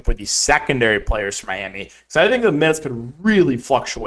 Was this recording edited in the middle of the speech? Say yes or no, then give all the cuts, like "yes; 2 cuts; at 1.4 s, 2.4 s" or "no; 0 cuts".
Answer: no; 0 cuts